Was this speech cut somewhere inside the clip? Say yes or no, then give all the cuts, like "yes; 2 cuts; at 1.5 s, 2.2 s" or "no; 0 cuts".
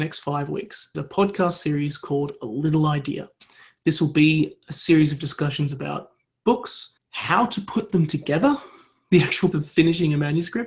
yes; 3 cuts; at 0.9 s, 7.0 s, 9.5 s